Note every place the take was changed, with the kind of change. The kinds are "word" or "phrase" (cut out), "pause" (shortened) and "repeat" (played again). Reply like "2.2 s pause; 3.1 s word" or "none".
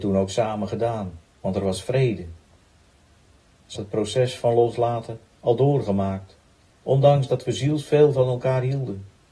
1.3 s pause; 3.8 s word; 6.7 s pause